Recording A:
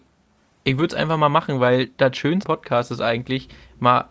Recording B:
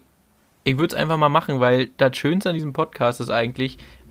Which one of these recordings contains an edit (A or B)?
A